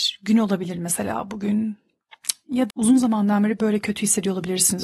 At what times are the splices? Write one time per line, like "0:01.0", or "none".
0:02.7